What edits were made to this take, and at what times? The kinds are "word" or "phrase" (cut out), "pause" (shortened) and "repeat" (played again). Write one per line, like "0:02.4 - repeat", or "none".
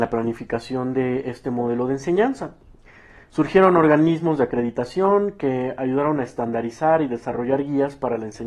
none